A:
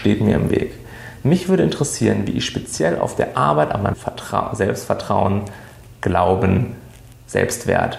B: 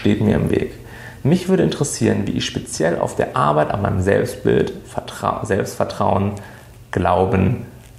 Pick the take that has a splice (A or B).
A